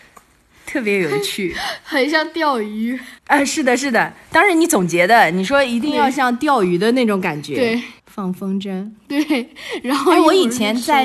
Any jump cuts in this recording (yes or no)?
yes